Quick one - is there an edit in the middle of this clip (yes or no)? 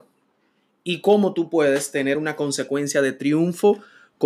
no